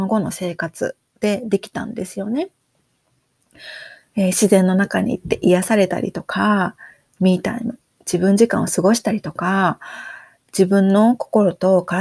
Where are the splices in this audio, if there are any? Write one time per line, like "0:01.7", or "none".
none

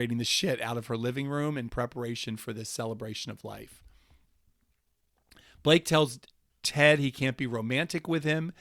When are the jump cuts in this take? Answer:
none

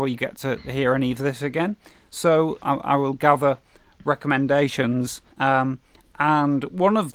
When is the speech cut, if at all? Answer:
0:02.6
0:05.3

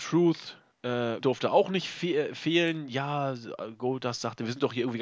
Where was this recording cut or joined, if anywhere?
0:01.2

